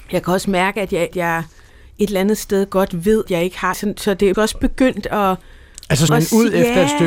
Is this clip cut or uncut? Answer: cut